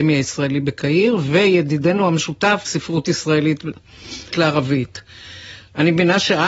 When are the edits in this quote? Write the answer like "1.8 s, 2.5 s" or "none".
2.7 s, 4.3 s